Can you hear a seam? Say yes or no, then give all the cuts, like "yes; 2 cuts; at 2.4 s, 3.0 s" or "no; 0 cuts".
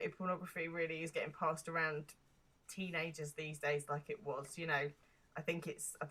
no; 0 cuts